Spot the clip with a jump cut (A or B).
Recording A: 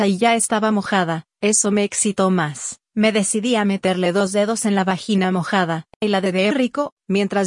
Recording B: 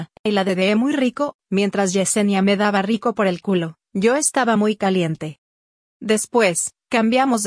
A